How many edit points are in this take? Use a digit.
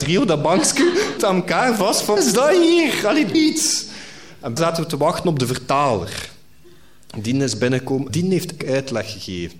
6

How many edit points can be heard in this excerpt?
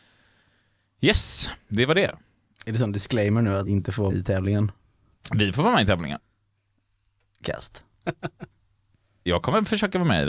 3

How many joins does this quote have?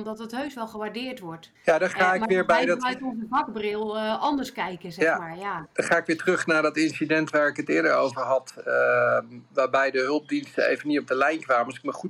1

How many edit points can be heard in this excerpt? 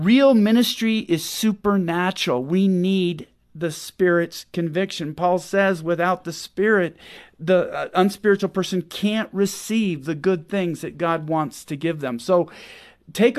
0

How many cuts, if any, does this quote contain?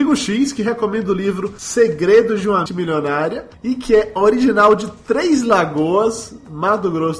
1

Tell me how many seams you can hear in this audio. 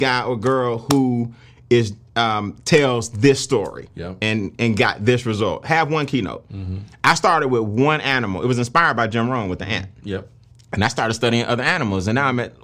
0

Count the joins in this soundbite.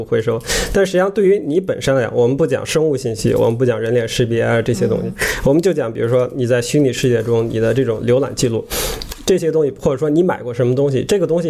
0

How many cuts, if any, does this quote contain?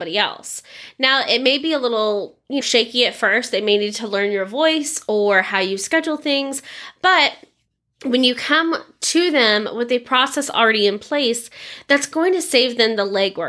1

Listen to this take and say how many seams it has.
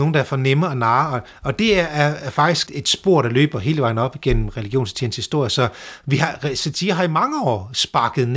1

